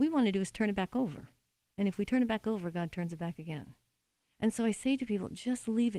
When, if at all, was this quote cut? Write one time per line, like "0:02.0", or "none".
none